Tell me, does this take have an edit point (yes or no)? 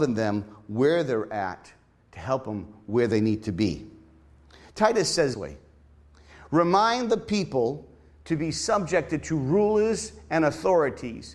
yes